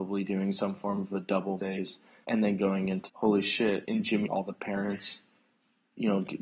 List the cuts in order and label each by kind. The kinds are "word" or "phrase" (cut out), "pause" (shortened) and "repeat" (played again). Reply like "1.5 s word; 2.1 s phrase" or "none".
1.6 s word; 2.2 s word; 3.1 s word; 3.8 s word; 4.3 s phrase